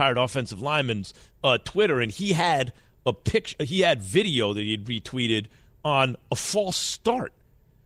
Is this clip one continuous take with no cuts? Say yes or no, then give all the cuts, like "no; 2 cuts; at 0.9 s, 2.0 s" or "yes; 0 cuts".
yes; 0 cuts